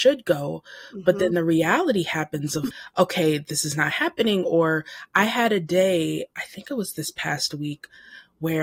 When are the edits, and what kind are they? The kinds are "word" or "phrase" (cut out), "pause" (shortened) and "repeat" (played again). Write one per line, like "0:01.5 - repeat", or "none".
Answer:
0:02.7 - word